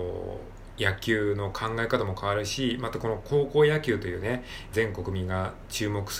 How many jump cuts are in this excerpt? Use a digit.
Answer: 1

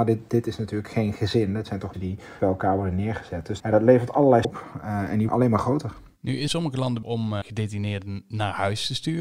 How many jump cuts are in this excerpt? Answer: 8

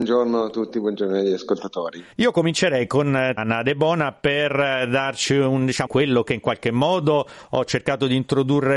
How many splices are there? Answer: 3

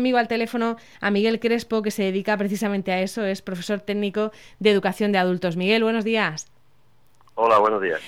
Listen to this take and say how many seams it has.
0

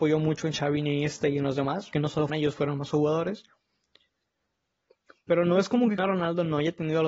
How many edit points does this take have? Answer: 3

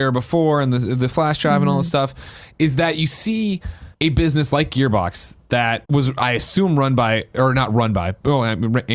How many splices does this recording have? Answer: 2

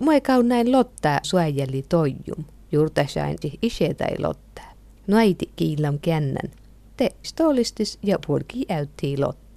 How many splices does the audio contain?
5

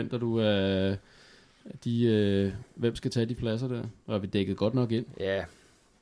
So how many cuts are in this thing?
3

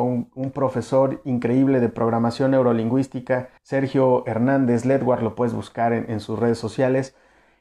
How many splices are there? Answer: 1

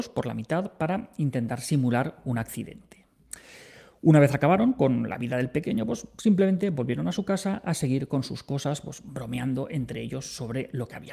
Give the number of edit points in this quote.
0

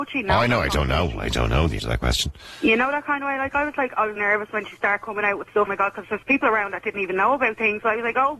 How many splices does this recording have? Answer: 3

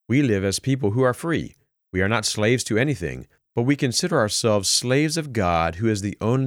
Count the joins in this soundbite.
0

